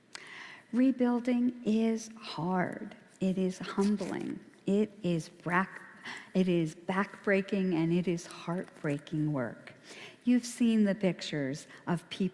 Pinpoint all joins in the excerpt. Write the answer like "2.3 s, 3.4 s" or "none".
none